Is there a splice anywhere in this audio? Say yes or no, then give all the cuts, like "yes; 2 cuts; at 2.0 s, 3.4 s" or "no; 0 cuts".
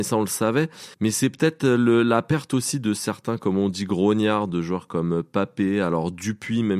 yes; 1 cut; at 0.9 s